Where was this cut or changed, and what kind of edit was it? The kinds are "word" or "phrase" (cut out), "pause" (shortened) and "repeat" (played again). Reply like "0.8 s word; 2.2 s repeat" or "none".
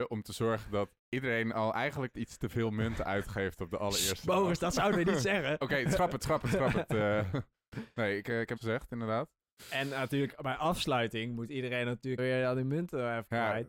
1.0 s pause; 2.1 s word; 8.6 s word; 12.2 s word